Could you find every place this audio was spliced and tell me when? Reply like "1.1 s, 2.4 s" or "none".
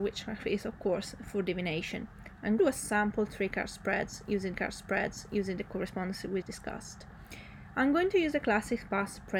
2.6 s, 4.5 s, 6.4 s

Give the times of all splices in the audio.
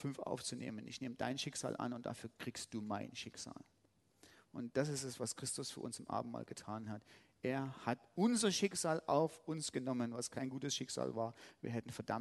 none

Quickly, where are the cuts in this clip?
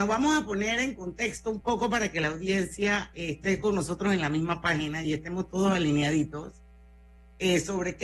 none

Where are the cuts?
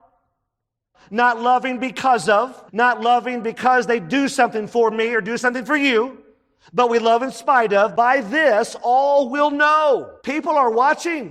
2.7 s, 10.2 s

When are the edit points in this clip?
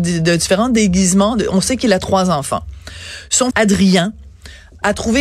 3.5 s

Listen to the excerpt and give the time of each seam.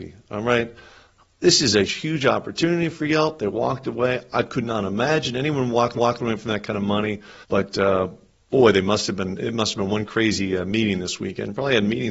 1.9 s, 6.0 s, 7.4 s

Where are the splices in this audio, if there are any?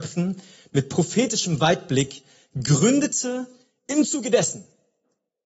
none

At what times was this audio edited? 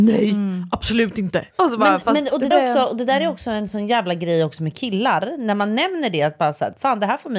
1.5 s, 2.5 s

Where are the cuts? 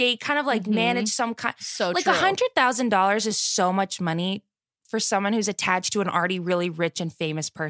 none

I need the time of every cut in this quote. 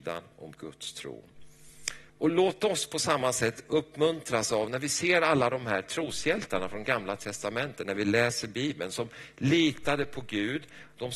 2.1 s

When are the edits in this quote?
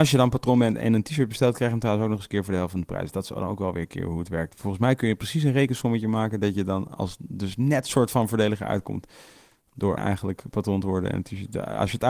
10.0 s

